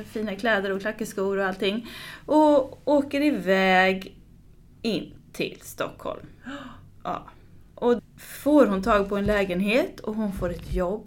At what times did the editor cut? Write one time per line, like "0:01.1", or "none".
0:08.0